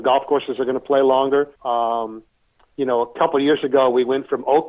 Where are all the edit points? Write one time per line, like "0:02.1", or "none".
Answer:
0:01.6